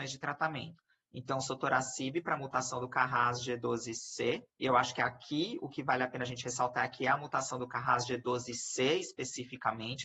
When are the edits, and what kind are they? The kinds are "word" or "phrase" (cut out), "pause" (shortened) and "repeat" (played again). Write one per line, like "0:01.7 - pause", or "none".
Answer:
0:04.5 - pause